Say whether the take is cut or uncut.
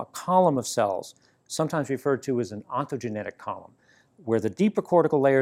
uncut